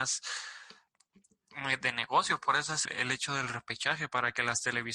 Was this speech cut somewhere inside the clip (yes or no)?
yes